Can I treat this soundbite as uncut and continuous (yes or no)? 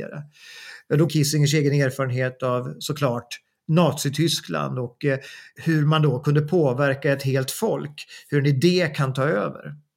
no